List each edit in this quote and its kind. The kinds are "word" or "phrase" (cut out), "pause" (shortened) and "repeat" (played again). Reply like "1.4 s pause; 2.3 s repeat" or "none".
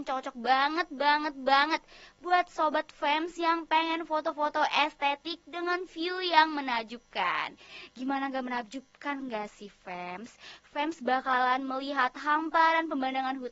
none